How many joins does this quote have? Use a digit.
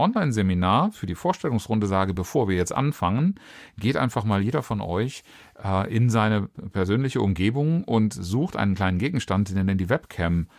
0